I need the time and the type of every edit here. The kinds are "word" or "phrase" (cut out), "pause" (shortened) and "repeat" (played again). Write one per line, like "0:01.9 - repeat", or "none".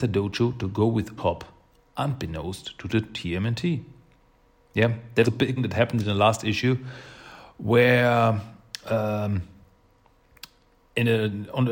0:01.2 - word
0:05.2 - word
0:05.6 - word